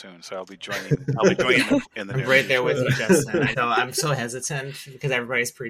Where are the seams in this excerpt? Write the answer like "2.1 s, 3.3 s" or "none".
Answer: 1.9 s, 3.5 s